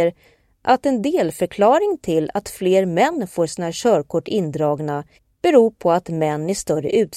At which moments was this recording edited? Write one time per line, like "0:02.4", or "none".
0:05.2